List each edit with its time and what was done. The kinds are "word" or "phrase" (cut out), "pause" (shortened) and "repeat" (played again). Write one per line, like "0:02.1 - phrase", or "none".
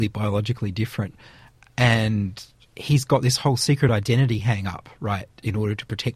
none